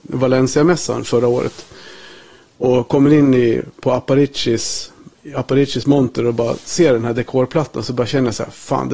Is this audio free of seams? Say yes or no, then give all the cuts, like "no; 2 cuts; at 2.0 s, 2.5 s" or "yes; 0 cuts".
yes; 0 cuts